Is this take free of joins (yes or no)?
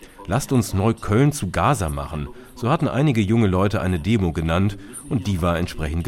yes